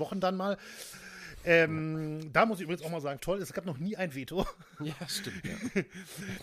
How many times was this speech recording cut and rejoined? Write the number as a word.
one